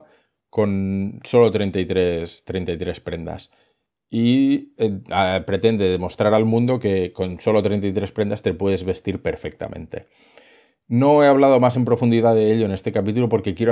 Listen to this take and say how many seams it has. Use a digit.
0